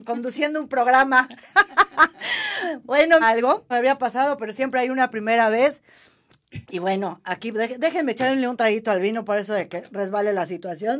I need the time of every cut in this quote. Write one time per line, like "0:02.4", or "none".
0:03.2
0:03.7
0:06.6